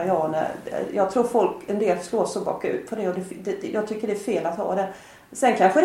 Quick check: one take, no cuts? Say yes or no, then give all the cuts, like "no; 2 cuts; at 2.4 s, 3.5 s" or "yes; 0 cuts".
yes; 0 cuts